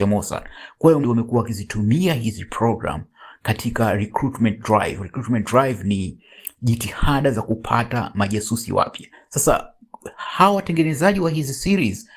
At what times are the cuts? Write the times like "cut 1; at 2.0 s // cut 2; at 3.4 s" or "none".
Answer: cut 1; at 1.0 s // cut 2; at 9.1 s